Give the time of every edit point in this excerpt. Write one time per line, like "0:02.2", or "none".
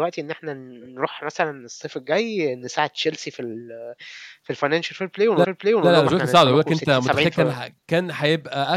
0:05.4
0:07.8